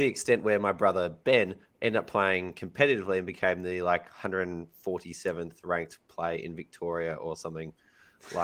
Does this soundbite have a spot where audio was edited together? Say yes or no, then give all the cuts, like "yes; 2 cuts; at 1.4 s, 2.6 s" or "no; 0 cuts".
yes; 1 cut; at 1.7 s